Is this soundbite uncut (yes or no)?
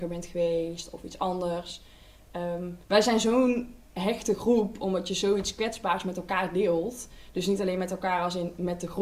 no